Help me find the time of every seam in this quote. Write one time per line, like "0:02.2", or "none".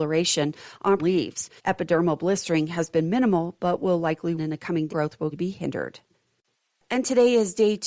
0:01.0
0:01.6
0:04.4
0:04.9
0:05.3

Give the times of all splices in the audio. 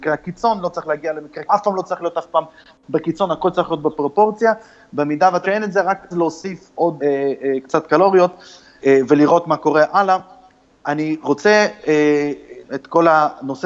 0:01.5
0:05.4
0:06.1
0:07.0
0:08.8
0:12.6

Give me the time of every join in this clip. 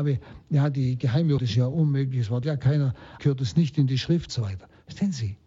0:01.4
0:02.4
0:03.2
0:04.3

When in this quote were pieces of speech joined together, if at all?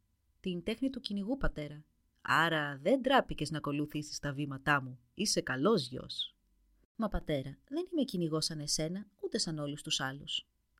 none

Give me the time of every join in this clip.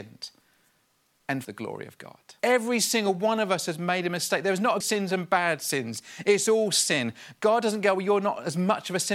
0:01.4
0:02.4
0:04.8

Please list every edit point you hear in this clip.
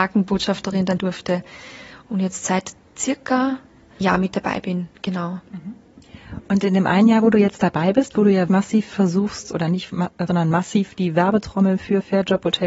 0:01.0
0:04.0
0:08.5
0:10.3

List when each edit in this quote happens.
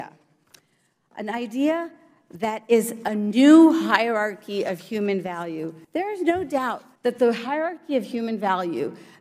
0:05.8
0:07.0

